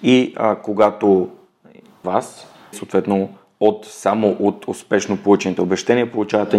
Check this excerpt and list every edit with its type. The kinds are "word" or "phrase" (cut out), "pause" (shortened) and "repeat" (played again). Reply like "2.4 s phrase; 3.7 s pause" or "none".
2.0 s word; 2.7 s word